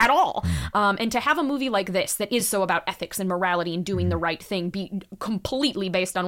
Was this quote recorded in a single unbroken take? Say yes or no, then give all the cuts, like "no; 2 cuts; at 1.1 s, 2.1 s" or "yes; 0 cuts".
yes; 0 cuts